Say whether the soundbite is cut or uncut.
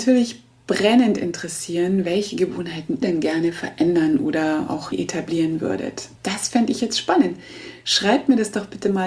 cut